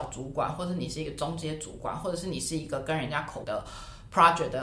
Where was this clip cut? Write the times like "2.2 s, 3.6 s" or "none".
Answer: 3.4 s